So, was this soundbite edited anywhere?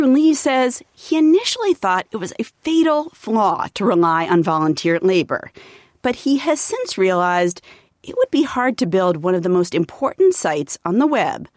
no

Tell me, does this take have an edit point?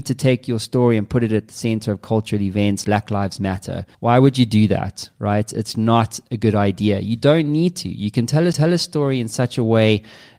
yes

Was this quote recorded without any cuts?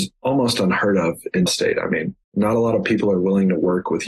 no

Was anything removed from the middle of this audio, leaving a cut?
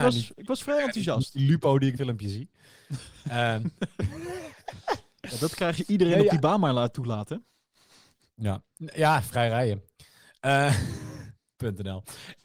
yes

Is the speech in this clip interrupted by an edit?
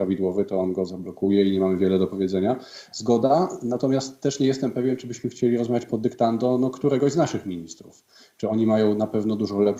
no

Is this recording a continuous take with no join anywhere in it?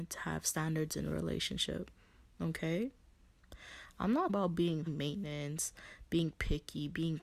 no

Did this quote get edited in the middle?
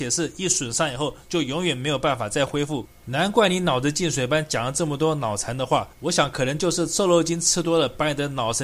yes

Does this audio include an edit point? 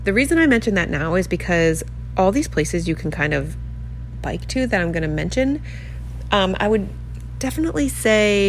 no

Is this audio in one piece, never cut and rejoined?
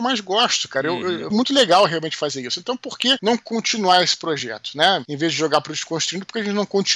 no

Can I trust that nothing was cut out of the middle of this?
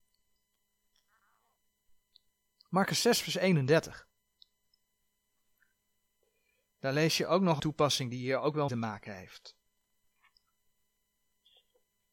no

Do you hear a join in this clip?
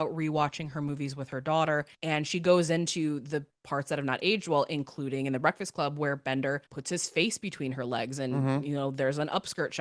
yes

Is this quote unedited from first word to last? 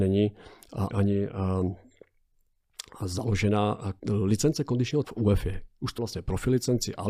no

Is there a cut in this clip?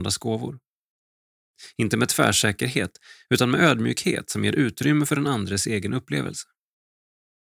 no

